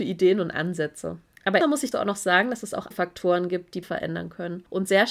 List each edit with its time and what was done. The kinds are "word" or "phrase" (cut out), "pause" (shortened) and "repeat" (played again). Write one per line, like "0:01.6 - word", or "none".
0:01.6 - word
0:01.9 - word
0:02.9 - word
0:03.8 - word